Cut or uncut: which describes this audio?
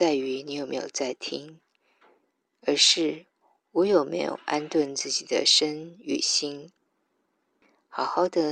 uncut